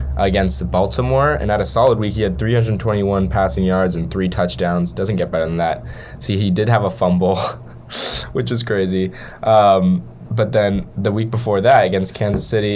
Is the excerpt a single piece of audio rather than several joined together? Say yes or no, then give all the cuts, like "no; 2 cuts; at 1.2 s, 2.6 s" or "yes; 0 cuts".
yes; 0 cuts